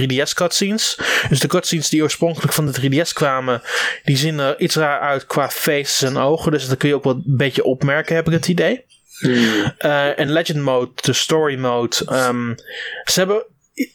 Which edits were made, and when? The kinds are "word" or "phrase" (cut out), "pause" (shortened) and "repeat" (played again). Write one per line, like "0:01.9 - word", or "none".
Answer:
none